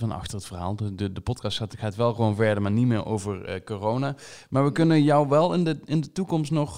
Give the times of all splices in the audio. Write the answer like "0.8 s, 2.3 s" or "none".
none

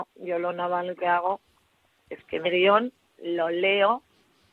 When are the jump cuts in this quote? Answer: 1.0 s, 2.4 s, 3.0 s

